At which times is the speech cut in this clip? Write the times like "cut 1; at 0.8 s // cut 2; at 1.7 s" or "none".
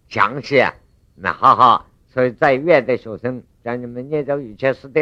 none